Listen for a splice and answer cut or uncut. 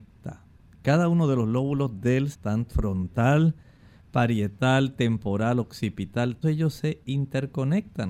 cut